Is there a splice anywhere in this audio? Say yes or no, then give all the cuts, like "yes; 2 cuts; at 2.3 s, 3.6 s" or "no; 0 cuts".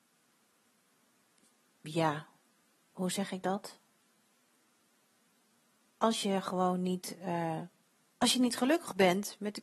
no; 0 cuts